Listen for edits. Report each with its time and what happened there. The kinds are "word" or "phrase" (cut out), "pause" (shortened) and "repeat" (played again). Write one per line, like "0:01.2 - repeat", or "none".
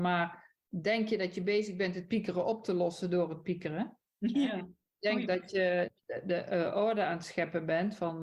none